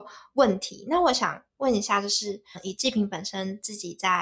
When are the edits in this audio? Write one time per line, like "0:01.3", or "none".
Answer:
0:02.5

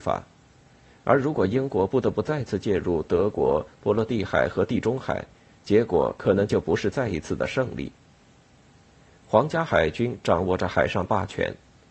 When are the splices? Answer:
none

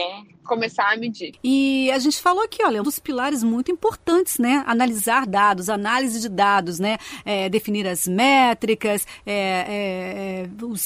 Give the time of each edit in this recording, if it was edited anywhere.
0:02.8

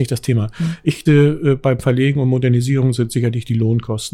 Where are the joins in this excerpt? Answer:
0:01.1

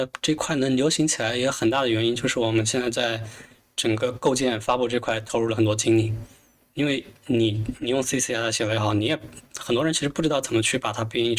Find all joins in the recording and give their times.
none

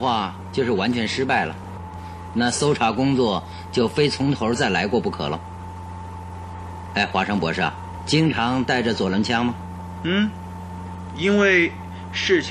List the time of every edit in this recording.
0:08.0

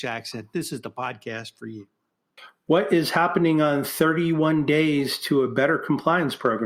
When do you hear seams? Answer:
none

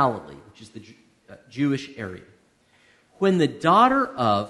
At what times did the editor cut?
none

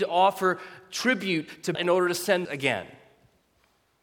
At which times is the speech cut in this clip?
0:01.7
0:02.4

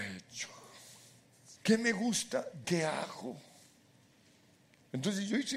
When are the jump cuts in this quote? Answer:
0:01.6
0:02.6

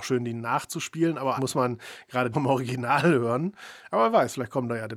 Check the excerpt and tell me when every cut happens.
0:01.4
0:02.3

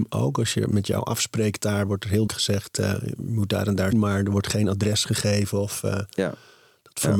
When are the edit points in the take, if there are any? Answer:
0:02.3
0:03.9

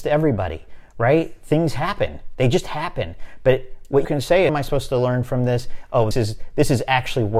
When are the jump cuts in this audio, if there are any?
0:04.0
0:04.5
0:06.1

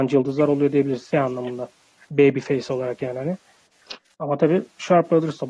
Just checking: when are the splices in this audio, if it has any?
0:01.1

